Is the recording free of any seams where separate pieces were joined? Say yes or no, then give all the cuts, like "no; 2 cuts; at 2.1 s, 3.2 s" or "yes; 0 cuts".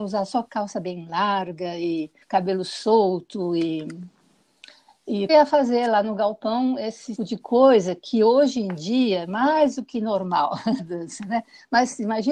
no; 4 cuts; at 2.2 s, 5.3 s, 7.2 s, 10.8 s